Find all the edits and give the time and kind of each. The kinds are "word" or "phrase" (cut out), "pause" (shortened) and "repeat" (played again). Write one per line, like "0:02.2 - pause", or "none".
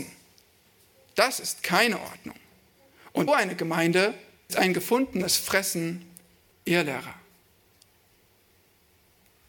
0:03.3 - word
0:04.5 - word
0:06.5 - word

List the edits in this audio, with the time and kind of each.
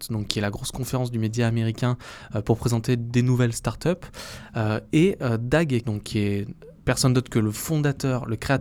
0:05.8 - word

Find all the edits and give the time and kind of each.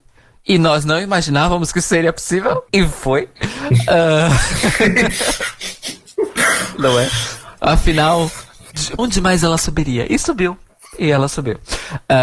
0:02.7 - pause
0:09.0 - word

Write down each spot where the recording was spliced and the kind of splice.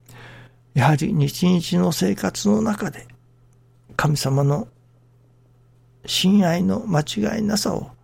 none

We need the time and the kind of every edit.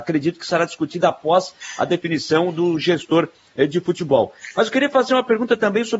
none

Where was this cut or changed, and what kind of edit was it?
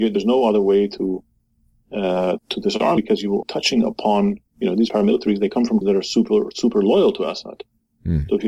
0:02.4 - word
0:03.0 - word
0:03.4 - word
0:04.5 - pause
0:05.8 - word

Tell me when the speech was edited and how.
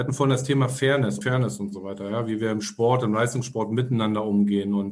0:01.2 - word

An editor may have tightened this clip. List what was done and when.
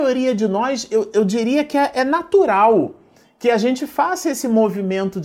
none

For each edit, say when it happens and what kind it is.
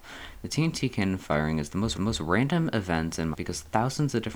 0:01.9 - repeat
0:03.3 - word

